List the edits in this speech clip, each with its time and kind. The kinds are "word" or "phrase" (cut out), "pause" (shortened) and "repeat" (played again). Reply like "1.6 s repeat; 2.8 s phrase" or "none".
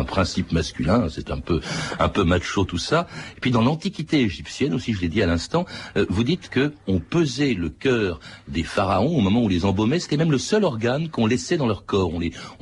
none